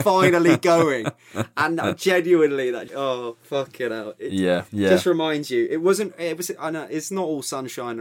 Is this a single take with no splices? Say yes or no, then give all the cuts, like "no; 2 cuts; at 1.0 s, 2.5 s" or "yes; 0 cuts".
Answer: no; 2 cuts; at 2.9 s, 4.7 s